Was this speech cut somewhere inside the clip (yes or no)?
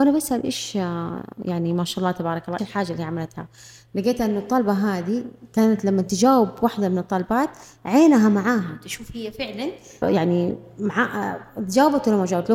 yes